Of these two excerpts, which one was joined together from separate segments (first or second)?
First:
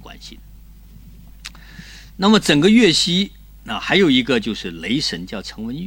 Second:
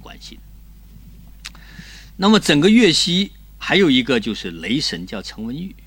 second